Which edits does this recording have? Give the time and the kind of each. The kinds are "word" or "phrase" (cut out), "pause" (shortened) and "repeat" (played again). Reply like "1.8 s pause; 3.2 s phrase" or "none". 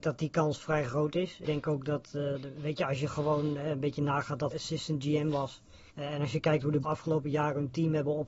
1.4 s word; 4.5 s word; 5.9 s pause; 6.8 s word